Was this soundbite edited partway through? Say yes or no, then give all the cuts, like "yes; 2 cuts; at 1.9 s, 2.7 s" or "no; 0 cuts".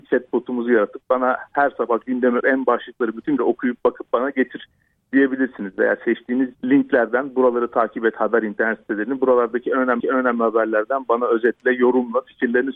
yes; 4 cuts; at 2.4 s, 3.4 s, 6.5 s, 10.0 s